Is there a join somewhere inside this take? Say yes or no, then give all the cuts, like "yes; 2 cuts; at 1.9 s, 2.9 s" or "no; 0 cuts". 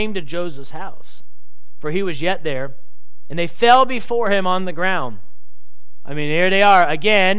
no; 0 cuts